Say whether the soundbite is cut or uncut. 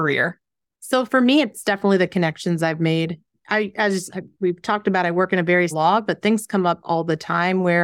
cut